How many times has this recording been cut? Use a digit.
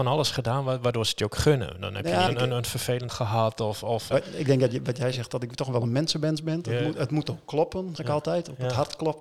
4